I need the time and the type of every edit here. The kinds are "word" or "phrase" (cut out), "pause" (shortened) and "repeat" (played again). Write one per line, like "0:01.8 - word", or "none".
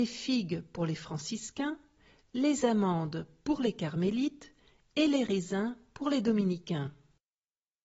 none